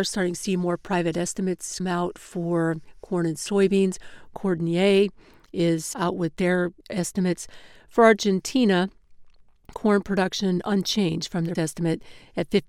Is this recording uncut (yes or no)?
no